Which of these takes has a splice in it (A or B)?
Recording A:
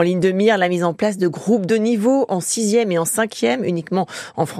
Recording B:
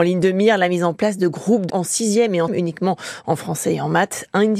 B